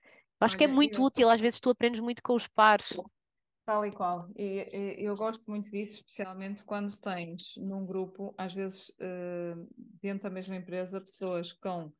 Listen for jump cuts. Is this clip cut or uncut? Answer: uncut